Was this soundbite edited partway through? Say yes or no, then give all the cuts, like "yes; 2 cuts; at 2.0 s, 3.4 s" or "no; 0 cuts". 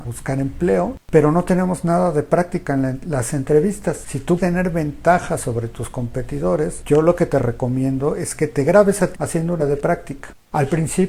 yes; 3 cuts; at 4.4 s, 9.1 s, 9.6 s